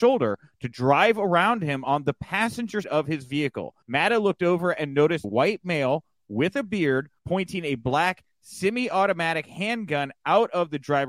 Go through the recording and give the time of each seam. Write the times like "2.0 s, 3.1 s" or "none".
2.8 s, 3.8 s, 5.2 s, 7.2 s

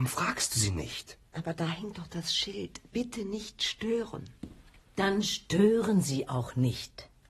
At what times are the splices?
none

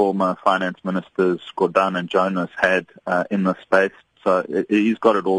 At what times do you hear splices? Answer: none

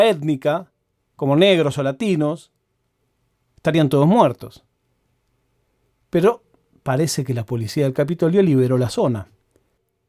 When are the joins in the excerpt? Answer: 1.0 s

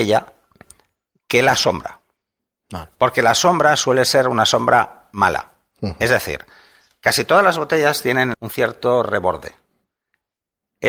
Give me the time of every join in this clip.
8.3 s

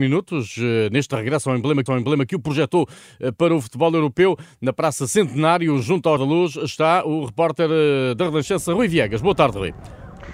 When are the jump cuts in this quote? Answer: 1.9 s, 6.2 s

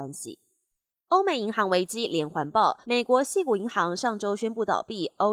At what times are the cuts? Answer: 2.8 s

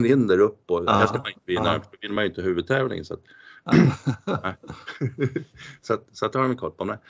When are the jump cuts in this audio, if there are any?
none

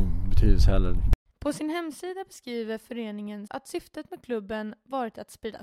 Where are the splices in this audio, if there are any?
1.3 s, 3.5 s

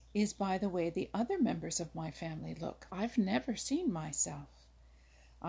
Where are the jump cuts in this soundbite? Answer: 2.9 s

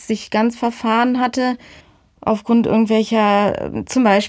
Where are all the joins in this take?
1.8 s

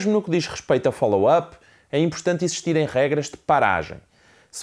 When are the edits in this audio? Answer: none

